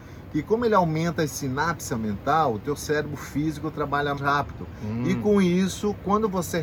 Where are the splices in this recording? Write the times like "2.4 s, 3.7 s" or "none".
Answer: 4.2 s